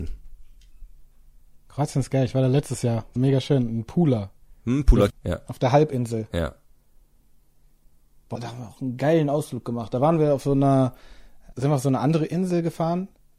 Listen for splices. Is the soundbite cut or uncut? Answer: cut